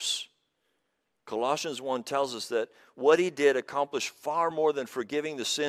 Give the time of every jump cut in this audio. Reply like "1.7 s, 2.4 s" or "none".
none